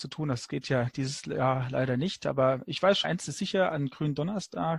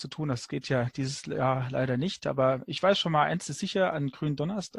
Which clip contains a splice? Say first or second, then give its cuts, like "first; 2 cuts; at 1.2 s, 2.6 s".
first; 1 cut; at 3.0 s